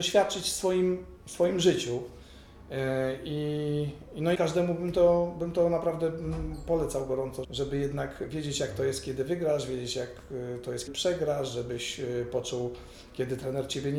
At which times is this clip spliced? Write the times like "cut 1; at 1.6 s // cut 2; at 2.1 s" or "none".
cut 1; at 4.3 s // cut 2; at 7.4 s // cut 3; at 10.9 s